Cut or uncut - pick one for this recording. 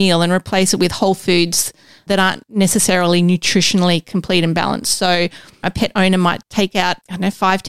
uncut